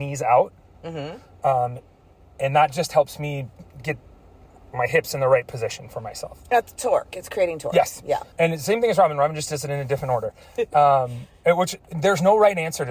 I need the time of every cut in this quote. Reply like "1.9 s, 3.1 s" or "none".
8.3 s